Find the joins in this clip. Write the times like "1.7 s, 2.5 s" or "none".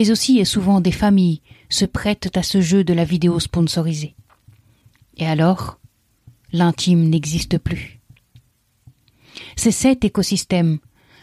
none